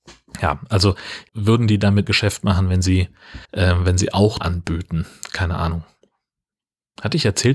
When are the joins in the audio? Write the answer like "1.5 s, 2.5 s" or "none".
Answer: 1.3 s, 2.1 s, 3.4 s, 4.4 s, 6.5 s